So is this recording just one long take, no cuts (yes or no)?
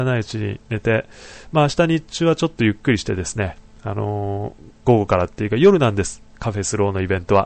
no